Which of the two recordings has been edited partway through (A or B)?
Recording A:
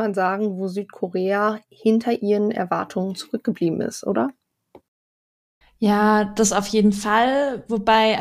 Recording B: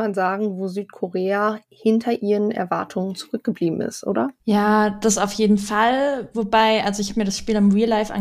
B